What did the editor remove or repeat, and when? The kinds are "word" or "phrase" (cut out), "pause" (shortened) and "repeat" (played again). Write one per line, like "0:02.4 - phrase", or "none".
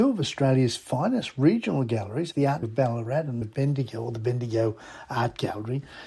0:02.3 - word
0:02.6 - word
0:03.4 - phrase